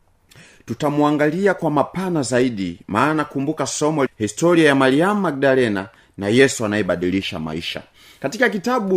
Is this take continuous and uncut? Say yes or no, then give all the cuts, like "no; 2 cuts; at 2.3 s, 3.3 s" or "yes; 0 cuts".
no; 1 cut; at 4.1 s